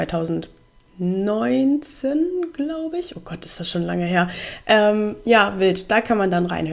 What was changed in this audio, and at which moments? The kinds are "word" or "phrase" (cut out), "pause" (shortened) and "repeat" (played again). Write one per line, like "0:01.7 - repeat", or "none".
none